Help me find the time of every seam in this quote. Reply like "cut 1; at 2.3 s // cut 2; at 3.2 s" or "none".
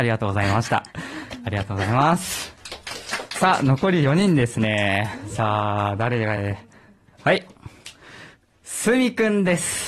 none